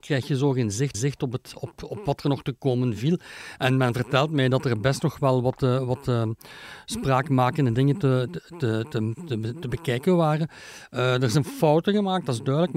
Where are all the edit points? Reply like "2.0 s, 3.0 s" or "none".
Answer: 0.9 s